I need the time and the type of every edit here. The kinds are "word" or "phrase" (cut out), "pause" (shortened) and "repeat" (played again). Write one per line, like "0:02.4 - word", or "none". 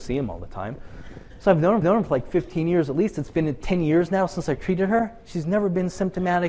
0:01.8 - repeat